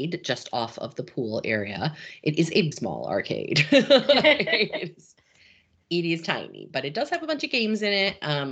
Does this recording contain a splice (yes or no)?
yes